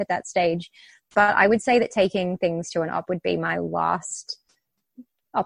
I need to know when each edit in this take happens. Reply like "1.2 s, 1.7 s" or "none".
3.0 s